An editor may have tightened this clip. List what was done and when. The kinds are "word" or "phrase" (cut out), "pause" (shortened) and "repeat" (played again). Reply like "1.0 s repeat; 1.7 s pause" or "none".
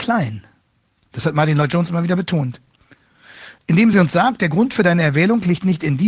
none